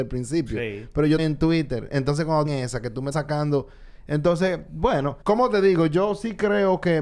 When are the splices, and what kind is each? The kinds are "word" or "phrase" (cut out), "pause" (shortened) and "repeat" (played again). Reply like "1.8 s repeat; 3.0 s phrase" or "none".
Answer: 1.2 s word; 2.4 s phrase; 3.1 s word; 5.2 s pause

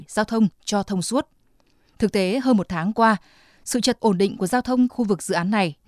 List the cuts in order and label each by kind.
4.0 s word; 4.9 s word

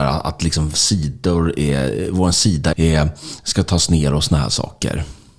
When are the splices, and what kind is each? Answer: 2.7 s phrase

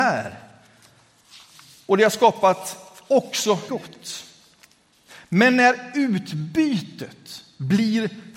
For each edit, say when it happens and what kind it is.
3.7 s word

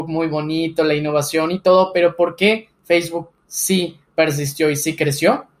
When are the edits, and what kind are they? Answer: none

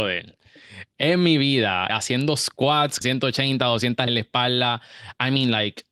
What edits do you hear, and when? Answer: 1.9 s word; 3.0 s word; 4.1 s word

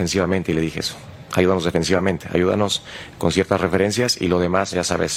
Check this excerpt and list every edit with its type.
none

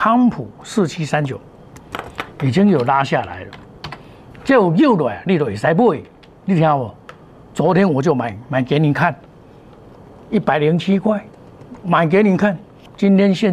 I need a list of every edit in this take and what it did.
none

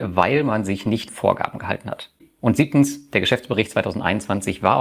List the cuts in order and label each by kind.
1.1 s phrase

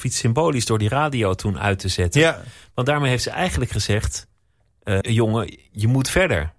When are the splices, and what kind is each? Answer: 5.0 s word

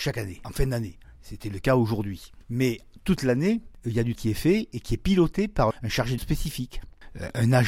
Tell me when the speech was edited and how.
4.1 s word; 5.7 s word; 6.2 s word

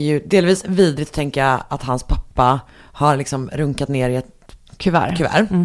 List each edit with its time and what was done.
none

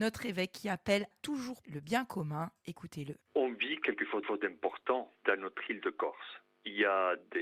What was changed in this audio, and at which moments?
1.1 s word; 1.6 s word; 3.2 s pause; 4.2 s repeat

